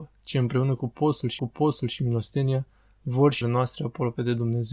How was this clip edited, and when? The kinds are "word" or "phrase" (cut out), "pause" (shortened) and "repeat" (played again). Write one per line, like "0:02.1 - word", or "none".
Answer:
0:01.4 - repeat
0:03.4 - word